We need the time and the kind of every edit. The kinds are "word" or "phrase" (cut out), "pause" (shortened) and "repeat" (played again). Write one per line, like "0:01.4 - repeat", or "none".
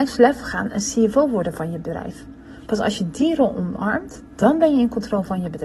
none